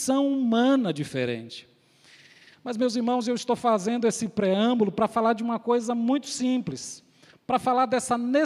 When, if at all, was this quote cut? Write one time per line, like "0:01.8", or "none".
none